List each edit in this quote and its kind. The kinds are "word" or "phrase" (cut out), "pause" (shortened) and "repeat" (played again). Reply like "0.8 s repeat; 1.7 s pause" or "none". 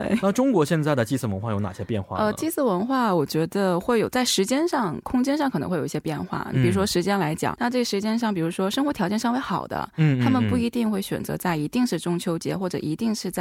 7.6 s word